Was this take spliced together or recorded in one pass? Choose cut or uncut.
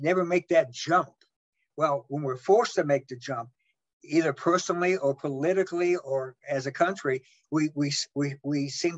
uncut